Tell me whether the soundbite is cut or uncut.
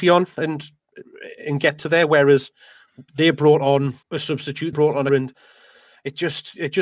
cut